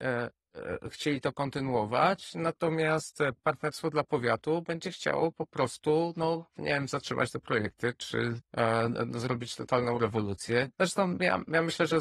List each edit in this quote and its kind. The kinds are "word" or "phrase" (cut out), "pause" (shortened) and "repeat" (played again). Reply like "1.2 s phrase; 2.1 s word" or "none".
8.5 s pause; 10.7 s pause